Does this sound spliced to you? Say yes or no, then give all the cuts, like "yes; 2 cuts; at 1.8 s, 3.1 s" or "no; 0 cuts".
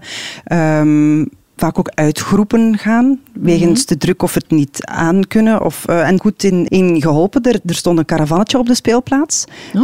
yes; 3 cuts; at 3.2 s, 6.2 s, 6.7 s